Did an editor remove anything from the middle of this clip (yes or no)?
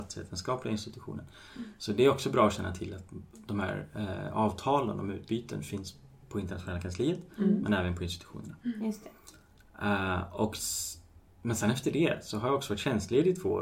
no